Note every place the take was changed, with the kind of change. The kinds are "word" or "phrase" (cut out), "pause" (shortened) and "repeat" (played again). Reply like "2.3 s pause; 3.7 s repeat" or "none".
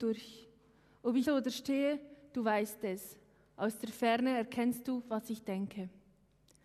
1.2 s word